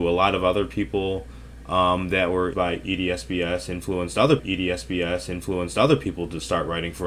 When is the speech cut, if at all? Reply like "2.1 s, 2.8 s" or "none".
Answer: 2.5 s, 4.4 s

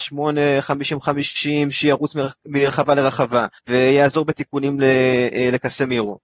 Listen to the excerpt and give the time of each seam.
3.6 s

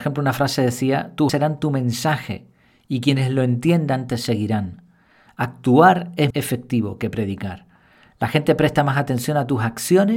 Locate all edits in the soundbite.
1.3 s, 6.3 s

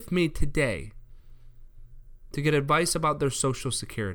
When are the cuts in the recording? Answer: none

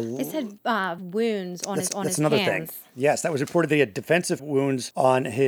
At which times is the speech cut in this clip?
1.0 s, 1.9 s, 4.4 s

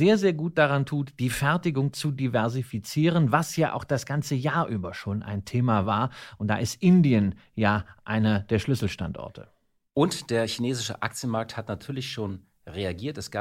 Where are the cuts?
none

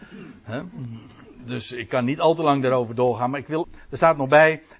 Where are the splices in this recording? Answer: 3.6 s

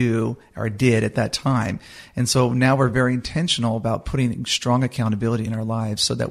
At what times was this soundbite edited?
none

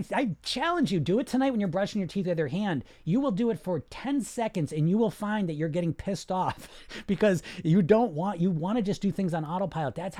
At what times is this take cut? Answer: none

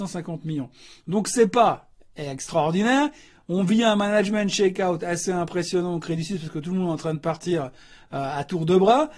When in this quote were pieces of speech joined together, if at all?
none

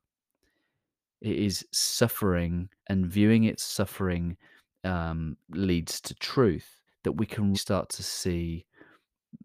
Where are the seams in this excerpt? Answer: 2.8 s, 3.6 s, 5.4 s, 6.9 s, 7.5 s

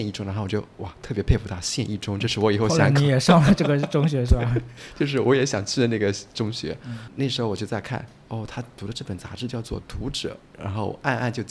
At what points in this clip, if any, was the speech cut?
none

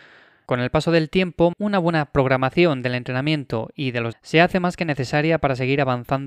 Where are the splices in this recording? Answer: 1.5 s, 4.1 s

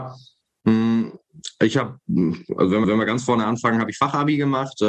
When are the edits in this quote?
2.8 s

